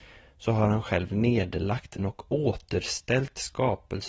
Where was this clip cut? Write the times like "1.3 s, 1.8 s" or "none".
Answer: 2.0 s

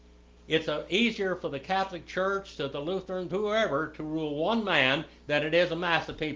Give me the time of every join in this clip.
3.3 s

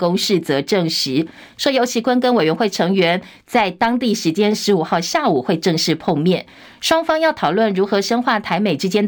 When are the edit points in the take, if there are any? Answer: none

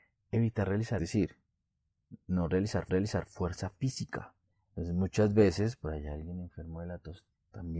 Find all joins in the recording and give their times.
1.0 s, 2.9 s, 4.4 s

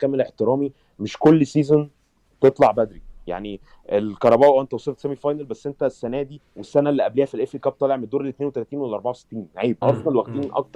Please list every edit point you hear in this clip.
6.5 s, 9.8 s

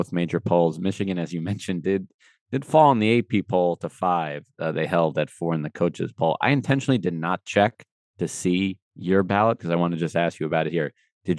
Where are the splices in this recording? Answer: 8.9 s

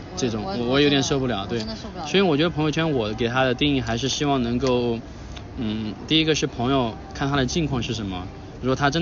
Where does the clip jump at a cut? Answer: none

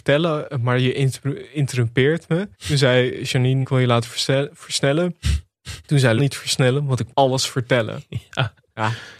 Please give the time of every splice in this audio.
2.5 s, 3.6 s, 5.8 s, 6.2 s, 7.1 s

